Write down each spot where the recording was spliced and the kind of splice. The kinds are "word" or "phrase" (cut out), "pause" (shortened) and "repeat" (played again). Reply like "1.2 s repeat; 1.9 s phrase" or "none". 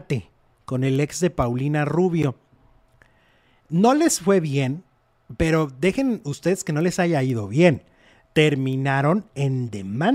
none